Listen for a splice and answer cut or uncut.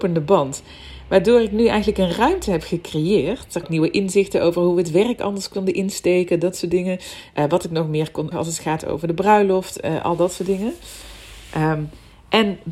cut